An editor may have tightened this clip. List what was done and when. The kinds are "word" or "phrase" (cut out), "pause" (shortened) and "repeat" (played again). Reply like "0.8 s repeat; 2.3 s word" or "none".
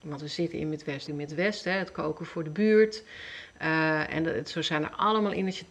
1.1 s word